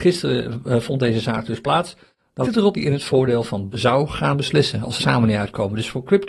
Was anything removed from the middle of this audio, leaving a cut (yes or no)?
yes